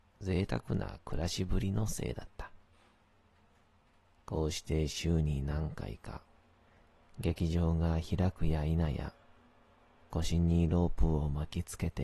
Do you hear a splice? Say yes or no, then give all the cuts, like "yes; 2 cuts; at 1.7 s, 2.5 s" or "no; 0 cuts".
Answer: no; 0 cuts